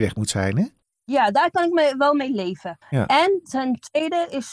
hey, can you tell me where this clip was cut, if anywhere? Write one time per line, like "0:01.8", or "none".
0:02.8

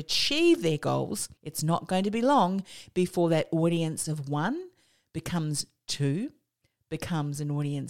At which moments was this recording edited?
0:01.4

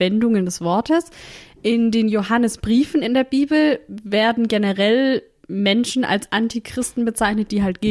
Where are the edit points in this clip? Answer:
none

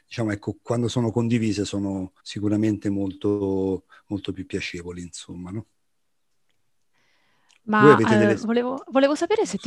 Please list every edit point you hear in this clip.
0:02.2

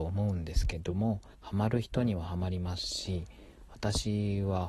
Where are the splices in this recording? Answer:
0:01.3

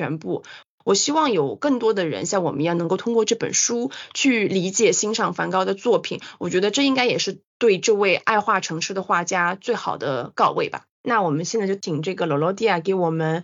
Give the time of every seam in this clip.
0:07.5
0:10.9

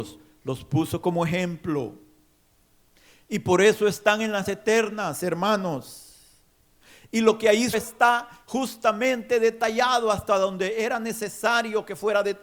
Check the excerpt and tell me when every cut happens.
0:04.4
0:07.7

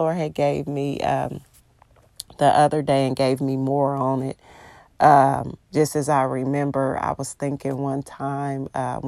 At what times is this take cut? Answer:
0:05.6

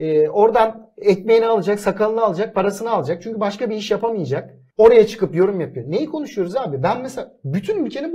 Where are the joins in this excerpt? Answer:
0:04.7

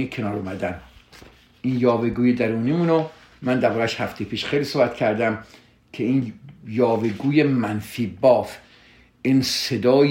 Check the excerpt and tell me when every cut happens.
none

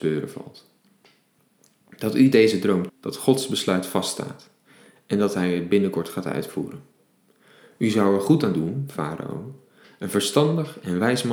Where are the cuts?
0:02.9

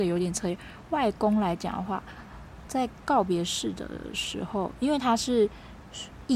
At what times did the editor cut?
0:02.7

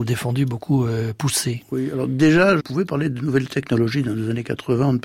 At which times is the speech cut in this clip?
0:02.6

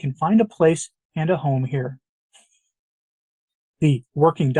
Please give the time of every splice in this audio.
none

